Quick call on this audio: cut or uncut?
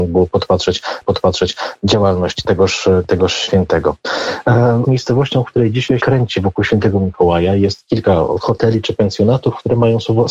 cut